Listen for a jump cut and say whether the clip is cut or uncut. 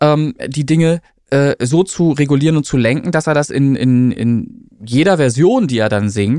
uncut